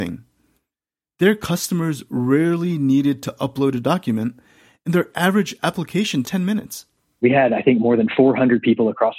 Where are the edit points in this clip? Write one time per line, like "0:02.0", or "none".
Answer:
0:06.2